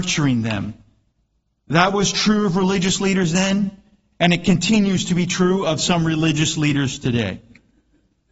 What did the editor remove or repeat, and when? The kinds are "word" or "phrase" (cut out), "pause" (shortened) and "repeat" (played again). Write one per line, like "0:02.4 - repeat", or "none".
none